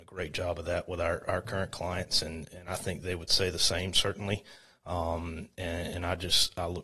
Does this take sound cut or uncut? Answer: uncut